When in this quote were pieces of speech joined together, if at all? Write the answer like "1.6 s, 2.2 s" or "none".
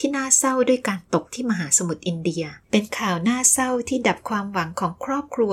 2.6 s